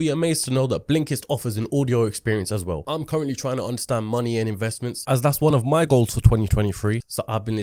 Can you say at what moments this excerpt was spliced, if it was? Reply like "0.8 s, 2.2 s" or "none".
none